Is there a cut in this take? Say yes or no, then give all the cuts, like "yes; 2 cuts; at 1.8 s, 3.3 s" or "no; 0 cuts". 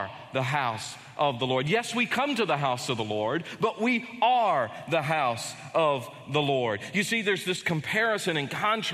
no; 0 cuts